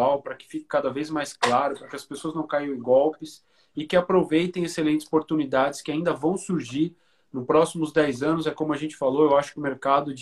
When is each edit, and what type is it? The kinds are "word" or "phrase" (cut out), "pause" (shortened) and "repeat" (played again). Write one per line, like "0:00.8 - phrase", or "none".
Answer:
none